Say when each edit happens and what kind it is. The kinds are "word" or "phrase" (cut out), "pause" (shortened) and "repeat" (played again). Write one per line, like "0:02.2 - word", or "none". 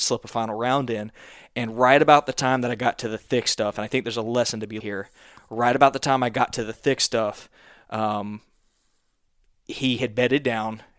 0:04.8 - word